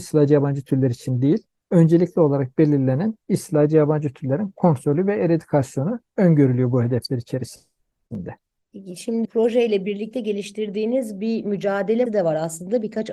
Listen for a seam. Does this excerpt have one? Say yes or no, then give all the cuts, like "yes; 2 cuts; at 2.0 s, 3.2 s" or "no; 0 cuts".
yes; 3 cuts; at 1.5 s, 9.2 s, 12.1 s